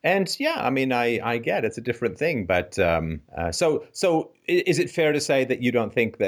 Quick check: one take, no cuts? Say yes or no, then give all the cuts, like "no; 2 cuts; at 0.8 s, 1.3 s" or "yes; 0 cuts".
no; 1 cut; at 3.3 s